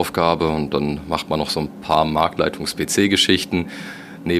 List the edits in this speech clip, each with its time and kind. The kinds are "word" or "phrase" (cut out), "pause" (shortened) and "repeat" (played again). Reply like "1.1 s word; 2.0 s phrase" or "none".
none